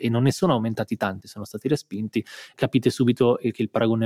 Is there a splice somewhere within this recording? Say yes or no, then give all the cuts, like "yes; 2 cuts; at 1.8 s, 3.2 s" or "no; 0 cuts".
yes; 2 cuts; at 1.2 s, 2.5 s